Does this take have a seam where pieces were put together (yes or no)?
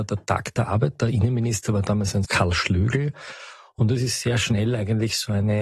yes